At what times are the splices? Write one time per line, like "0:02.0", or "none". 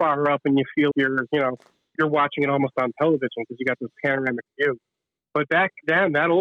0:00.9
0:02.0